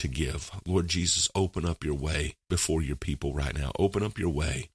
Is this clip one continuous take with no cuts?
no; 1 cut; at 2.4 s

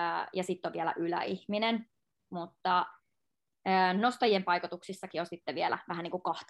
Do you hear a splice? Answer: no; 0 cuts

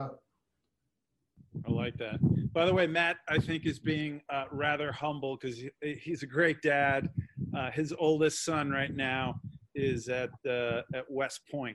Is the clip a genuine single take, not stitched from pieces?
yes; 0 cuts

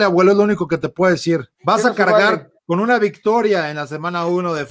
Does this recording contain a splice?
yes; 2 cuts; at 1.5 s, 2.6 s

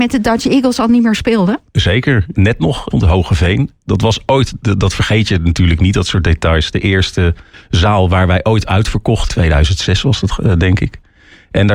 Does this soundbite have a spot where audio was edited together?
yes; 4 cuts; at 2.3 s, 2.9 s, 7.5 s, 9.3 s

